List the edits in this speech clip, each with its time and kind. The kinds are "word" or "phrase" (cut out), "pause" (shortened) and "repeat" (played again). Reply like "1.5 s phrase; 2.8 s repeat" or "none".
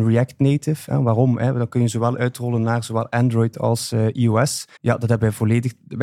4.8 s pause